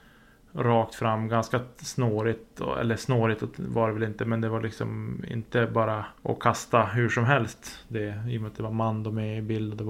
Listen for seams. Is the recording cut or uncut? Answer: cut